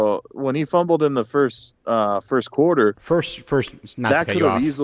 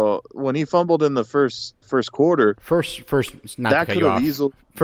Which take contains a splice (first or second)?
second